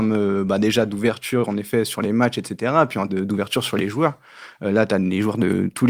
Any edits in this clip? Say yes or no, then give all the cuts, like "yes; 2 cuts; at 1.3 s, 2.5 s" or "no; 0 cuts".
yes; 1 cut; at 3.1 s